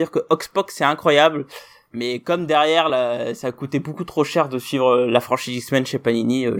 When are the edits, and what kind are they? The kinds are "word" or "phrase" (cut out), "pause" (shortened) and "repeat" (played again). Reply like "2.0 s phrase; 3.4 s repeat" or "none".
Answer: none